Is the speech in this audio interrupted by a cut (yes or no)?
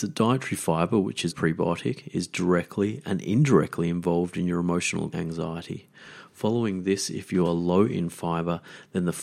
yes